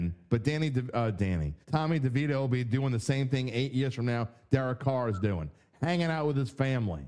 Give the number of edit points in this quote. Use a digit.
1